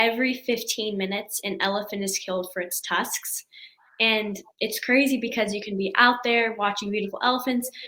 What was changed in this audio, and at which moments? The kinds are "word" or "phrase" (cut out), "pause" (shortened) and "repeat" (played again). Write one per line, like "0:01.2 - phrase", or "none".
none